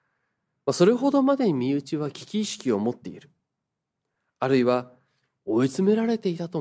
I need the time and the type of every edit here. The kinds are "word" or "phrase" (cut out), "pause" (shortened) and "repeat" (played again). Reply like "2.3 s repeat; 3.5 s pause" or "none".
none